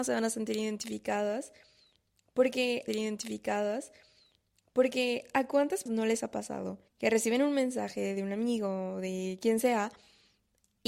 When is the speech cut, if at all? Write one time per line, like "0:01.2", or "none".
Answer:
0:02.9
0:05.9
0:06.9